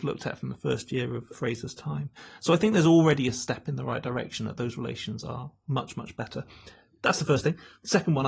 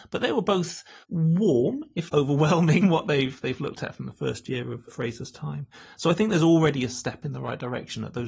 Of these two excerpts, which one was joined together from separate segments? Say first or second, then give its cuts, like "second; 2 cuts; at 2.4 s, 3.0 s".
second; 3 cuts; at 1.0 s, 2.1 s, 2.8 s